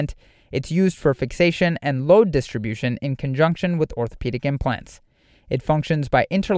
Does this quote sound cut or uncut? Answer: uncut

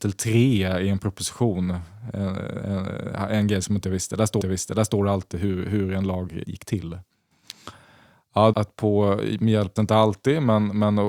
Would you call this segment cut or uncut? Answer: cut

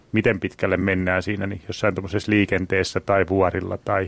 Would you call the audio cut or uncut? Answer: uncut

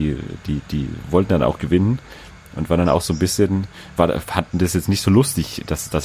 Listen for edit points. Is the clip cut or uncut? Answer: cut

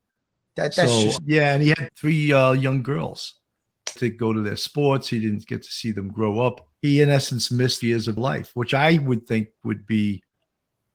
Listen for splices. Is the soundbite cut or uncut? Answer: cut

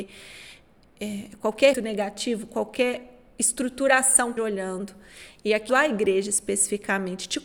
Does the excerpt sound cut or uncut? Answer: cut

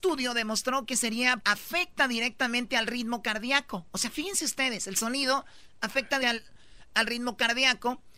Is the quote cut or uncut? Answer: cut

